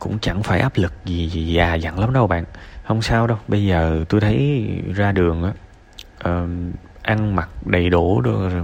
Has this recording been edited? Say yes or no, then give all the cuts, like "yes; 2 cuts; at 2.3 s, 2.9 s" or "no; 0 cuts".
no; 0 cuts